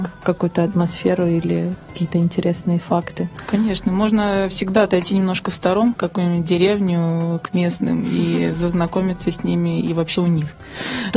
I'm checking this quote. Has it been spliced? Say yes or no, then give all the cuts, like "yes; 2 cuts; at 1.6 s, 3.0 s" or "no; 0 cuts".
yes; 3 cuts; at 2.8 s, 6.0 s, 10.2 s